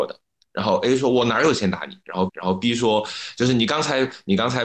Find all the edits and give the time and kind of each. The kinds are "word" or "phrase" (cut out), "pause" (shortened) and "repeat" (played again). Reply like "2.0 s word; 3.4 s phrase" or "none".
2.3 s repeat